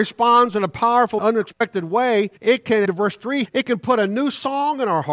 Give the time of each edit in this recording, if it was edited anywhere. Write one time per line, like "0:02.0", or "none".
0:01.2
0:02.4
0:02.8
0:03.4